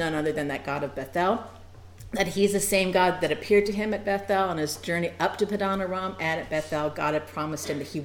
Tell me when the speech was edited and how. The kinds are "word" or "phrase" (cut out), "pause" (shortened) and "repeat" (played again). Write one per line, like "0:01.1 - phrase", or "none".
none